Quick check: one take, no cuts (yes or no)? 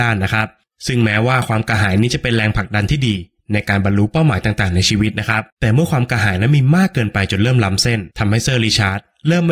no